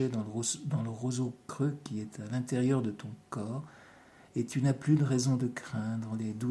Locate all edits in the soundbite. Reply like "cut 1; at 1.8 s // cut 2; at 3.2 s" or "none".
none